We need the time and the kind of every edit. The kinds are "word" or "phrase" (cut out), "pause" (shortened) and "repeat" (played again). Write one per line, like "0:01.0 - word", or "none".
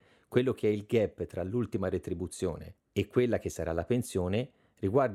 none